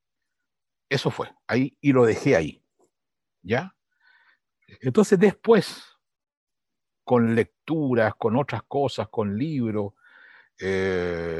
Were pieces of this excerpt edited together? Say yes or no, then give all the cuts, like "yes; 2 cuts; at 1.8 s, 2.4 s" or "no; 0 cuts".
no; 0 cuts